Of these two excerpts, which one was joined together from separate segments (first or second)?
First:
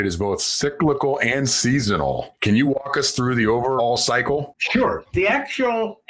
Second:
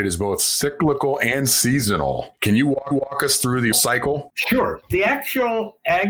second